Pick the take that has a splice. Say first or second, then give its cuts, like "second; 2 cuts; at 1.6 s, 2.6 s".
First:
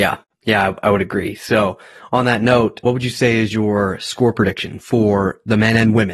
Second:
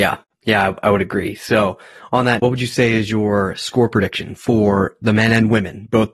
second; 1 cut; at 2.4 s